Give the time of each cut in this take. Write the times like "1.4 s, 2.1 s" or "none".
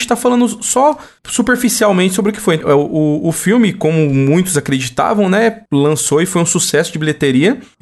2.6 s